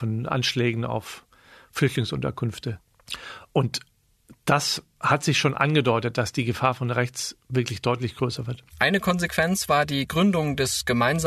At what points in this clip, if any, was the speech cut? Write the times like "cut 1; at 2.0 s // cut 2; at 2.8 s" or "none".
none